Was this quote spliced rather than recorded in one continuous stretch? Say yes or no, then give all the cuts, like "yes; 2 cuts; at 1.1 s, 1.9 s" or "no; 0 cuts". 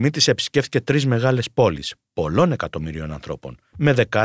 no; 0 cuts